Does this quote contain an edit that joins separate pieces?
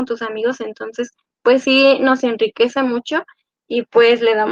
no; 0 cuts

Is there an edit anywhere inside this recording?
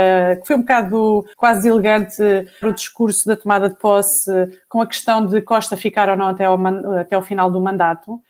yes; 2 cuts; at 1.3 s, 2.6 s

